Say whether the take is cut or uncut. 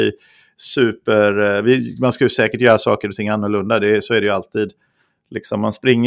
uncut